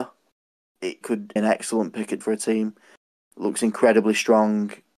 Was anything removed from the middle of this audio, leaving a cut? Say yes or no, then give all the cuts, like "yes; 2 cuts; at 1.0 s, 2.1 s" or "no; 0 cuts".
yes; 3 cuts; at 1.0 s, 1.4 s, 2.2 s